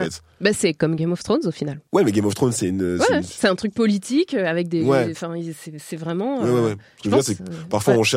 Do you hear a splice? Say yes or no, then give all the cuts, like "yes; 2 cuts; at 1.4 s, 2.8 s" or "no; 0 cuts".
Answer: yes; 1 cut; at 1.9 s